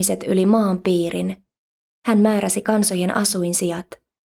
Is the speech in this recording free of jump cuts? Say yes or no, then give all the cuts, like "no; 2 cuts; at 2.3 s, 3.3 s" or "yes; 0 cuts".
yes; 0 cuts